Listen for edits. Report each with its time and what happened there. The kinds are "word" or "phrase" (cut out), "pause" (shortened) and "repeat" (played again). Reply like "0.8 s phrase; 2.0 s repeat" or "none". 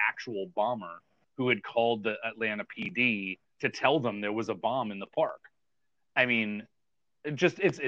none